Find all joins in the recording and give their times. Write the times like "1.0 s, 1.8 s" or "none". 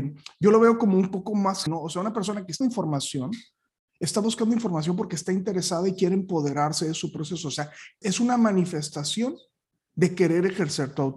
1.7 s, 2.6 s, 8.0 s